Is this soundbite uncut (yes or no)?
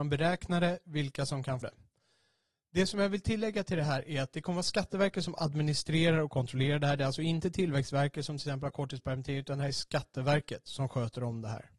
no